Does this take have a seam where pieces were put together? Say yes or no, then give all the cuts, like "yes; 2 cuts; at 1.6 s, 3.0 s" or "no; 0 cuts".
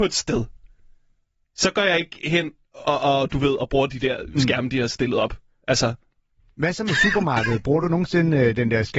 no; 0 cuts